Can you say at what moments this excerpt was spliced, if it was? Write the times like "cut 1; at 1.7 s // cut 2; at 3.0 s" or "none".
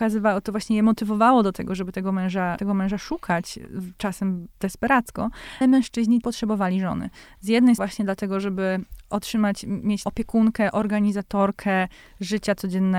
cut 1; at 2.6 s // cut 2; at 5.6 s // cut 3; at 6.2 s // cut 4; at 7.8 s // cut 5; at 10.0 s